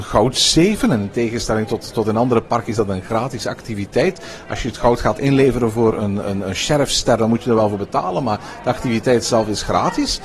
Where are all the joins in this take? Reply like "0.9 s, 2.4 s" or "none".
none